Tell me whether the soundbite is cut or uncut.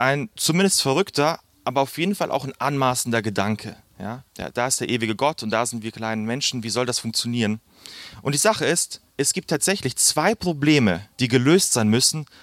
cut